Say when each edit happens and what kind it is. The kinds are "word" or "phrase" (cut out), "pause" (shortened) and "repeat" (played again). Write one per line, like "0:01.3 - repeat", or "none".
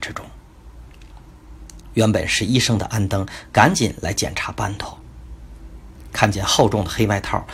none